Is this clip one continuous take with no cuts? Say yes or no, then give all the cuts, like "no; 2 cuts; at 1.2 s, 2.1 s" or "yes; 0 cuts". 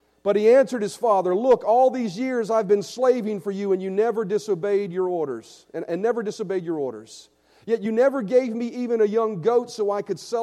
yes; 0 cuts